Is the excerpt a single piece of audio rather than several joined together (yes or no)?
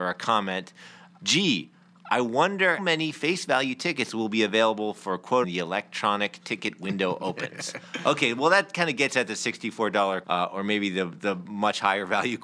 no